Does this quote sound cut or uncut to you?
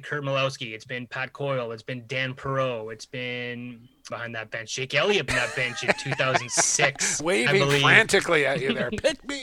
cut